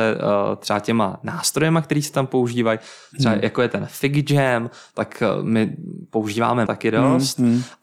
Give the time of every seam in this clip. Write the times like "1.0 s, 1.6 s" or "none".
6.7 s